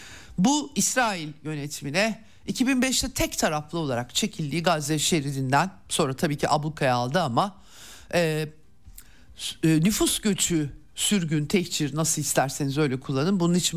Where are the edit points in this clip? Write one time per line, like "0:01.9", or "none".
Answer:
none